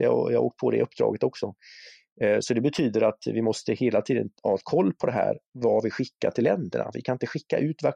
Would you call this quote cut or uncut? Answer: cut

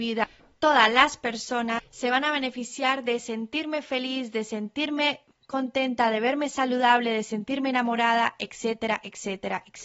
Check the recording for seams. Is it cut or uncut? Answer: uncut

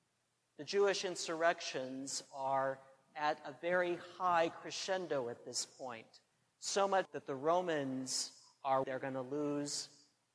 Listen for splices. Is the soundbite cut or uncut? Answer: cut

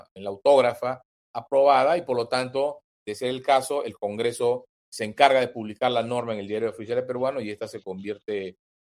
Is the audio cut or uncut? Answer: uncut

